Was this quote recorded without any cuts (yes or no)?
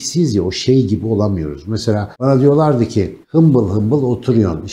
no